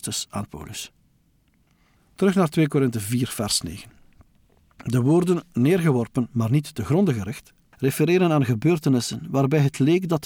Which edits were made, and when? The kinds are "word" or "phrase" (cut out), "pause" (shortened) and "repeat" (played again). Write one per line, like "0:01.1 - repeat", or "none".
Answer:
none